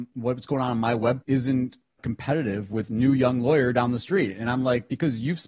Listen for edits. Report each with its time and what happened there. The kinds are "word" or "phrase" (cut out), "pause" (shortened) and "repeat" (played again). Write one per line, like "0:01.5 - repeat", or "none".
0:01.2 - word
0:02.0 - word
0:02.9 - word

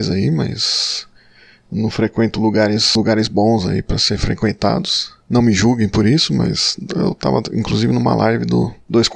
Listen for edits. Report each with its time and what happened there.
none

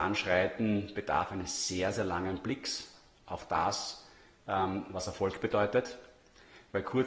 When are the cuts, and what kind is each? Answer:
none

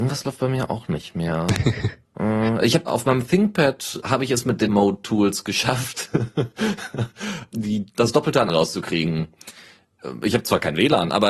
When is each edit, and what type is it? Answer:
0:02.9 - word
0:04.0 - word
0:04.7 - word
0:07.5 - word
0:08.5 - word

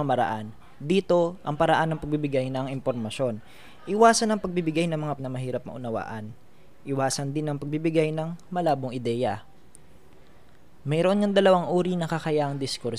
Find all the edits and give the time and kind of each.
0:05.2 - word

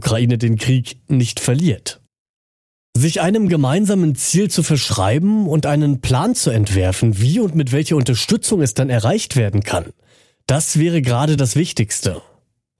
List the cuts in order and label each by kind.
none

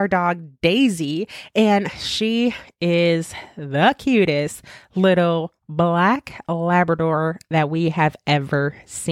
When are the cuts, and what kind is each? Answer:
none

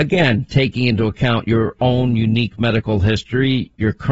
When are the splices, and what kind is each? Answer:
none

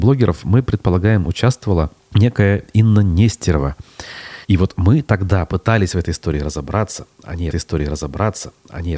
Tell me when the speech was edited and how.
0:02.0 - pause
0:04.4 - pause
0:07.5 - repeat

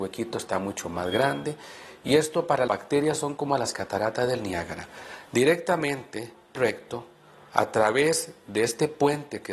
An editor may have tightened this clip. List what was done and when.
0:02.7 - word
0:06.5 - word

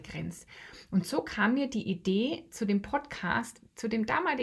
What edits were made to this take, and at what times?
none

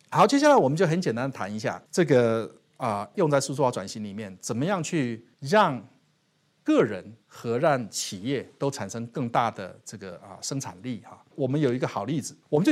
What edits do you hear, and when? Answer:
0:01.9 - pause
0:03.1 - word
0:05.3 - pause
0:07.2 - pause

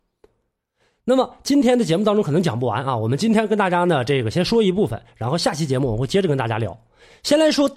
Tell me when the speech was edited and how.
none

